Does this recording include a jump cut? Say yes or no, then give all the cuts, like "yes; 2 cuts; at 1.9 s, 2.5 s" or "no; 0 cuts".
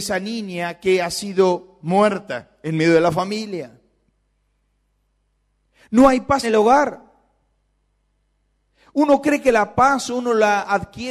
yes; 1 cut; at 6.4 s